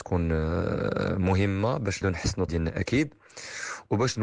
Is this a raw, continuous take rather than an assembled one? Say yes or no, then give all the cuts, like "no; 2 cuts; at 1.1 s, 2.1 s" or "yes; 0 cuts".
no; 2 cuts; at 2.0 s, 2.5 s